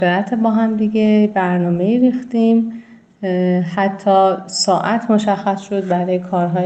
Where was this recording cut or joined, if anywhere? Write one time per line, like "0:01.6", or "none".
none